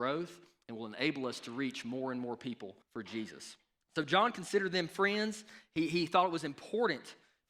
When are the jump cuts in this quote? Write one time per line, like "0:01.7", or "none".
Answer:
0:02.8
0:03.8